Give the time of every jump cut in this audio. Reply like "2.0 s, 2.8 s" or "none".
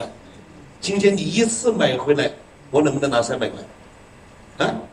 none